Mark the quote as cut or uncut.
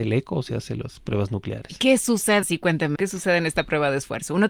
cut